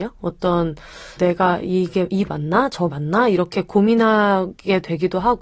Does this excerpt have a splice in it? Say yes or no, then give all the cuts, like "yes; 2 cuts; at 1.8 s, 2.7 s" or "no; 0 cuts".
yes; 3 cuts; at 1.2 s, 2.3 s, 2.9 s